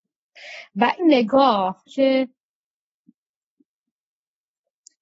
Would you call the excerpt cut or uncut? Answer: cut